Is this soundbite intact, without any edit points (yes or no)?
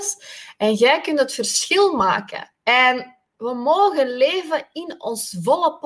no